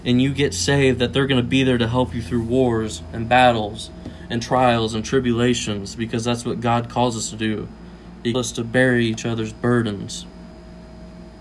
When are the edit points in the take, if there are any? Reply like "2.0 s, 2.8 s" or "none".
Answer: 8.3 s